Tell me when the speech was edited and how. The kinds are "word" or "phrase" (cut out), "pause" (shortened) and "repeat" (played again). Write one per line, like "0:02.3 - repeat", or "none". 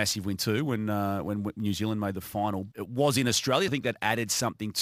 0:02.7 - phrase
0:03.7 - word